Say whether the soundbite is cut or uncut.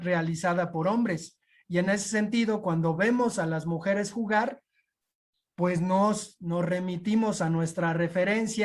uncut